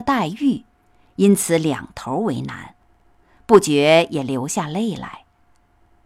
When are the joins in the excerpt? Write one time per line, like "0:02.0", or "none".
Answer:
none

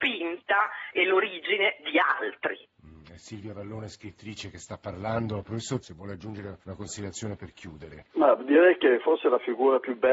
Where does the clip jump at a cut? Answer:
0:05.8
0:06.6
0:08.1

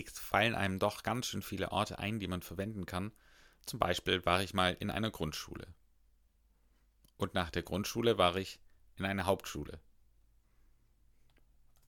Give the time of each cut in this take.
none

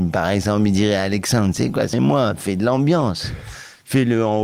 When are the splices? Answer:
0:01.9

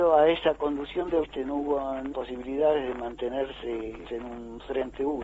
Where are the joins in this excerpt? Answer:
0:01.2
0:02.1
0:04.0

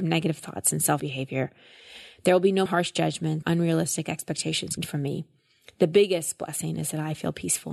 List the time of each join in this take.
0:01.0
0:02.7
0:03.4
0:04.8

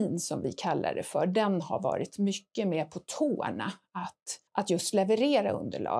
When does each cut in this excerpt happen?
0:04.5

